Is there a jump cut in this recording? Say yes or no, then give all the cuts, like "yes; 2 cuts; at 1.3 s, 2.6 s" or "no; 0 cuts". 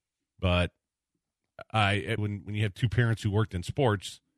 yes; 1 cut; at 2.2 s